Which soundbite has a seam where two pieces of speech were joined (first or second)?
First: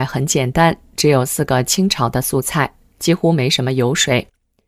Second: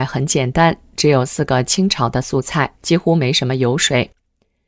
second